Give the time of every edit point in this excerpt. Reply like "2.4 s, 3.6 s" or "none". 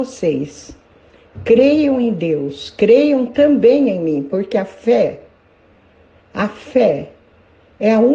none

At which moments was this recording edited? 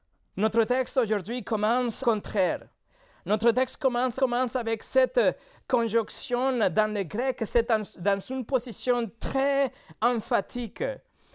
2.0 s, 4.2 s

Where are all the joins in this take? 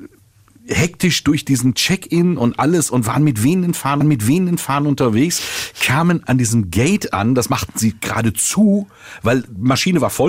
4.0 s, 6.2 s

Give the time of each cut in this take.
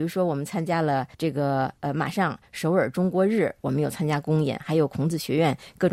1.1 s

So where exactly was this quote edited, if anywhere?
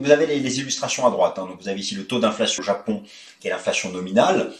2.6 s

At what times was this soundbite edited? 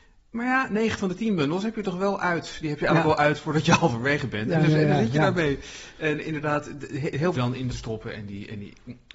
7.3 s, 7.7 s

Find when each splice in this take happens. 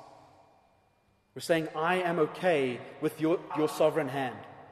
3.5 s

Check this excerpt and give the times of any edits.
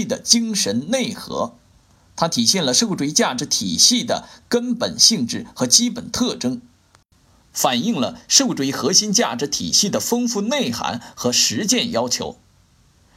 none

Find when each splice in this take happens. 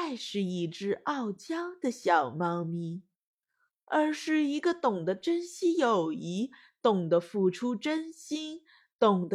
none

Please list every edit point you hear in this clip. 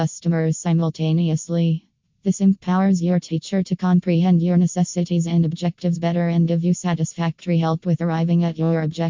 none

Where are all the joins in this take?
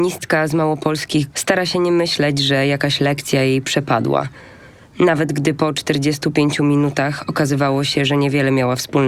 1.3 s

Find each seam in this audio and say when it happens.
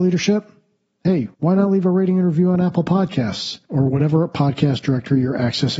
1.3 s

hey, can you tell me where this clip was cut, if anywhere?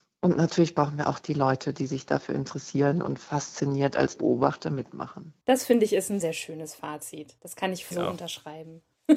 4.2 s, 5.4 s, 6.2 s, 7.4 s, 7.9 s

